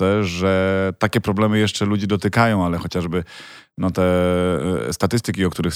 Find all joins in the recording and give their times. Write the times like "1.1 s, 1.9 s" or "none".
none